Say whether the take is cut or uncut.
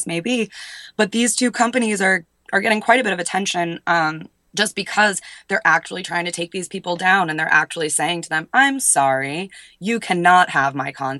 uncut